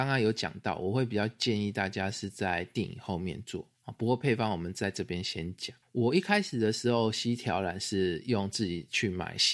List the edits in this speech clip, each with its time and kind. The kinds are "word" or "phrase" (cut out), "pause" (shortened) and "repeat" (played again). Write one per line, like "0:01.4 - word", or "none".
0:03.7 - pause